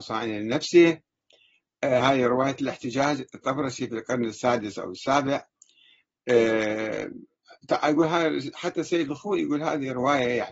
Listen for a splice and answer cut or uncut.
uncut